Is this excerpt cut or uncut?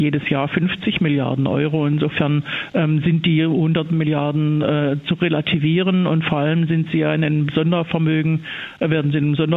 uncut